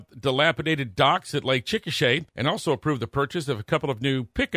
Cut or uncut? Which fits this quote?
cut